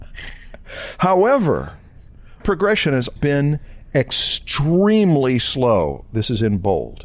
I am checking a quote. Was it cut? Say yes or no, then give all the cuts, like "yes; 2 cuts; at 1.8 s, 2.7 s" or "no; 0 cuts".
yes; 2 cuts; at 2.4 s, 3.2 s